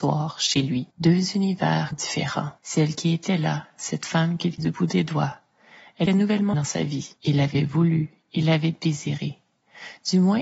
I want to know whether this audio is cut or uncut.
cut